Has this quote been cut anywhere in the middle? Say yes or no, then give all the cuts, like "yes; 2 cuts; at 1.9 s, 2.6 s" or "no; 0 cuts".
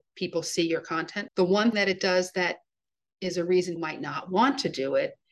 yes; 3 cuts; at 1.3 s, 1.7 s, 3.8 s